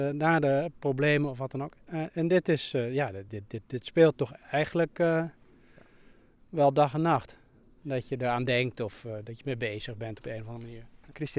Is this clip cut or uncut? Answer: uncut